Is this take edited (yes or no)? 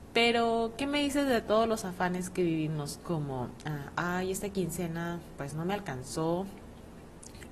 no